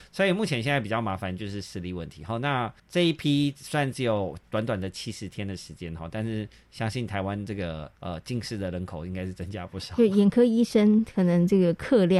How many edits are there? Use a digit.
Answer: 2